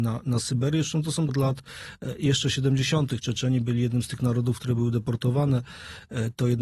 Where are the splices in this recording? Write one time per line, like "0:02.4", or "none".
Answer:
0:01.3